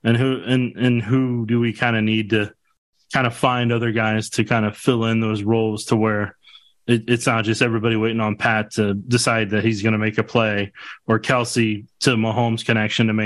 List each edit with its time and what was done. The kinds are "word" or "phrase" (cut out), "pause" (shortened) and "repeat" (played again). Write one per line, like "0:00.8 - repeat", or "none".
none